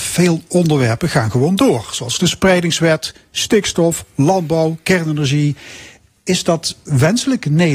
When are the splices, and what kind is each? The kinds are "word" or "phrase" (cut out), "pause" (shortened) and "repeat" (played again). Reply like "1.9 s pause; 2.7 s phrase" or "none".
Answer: none